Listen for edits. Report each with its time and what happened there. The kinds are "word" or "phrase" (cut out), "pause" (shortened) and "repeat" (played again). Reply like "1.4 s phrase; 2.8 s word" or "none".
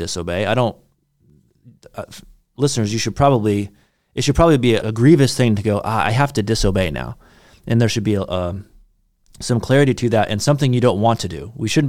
4.8 s word